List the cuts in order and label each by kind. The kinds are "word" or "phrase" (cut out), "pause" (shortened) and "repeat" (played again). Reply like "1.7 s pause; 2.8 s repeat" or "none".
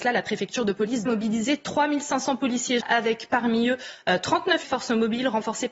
1.1 s word; 2.8 s word; 4.6 s word

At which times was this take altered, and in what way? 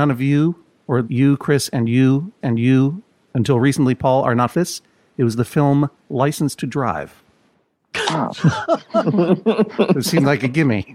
1.0 s word; 2.4 s repeat; 4.5 s phrase

